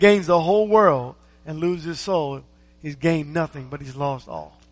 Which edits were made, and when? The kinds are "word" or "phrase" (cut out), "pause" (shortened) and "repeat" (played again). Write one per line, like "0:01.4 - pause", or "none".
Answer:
none